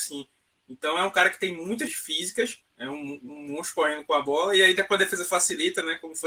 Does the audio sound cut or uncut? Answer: cut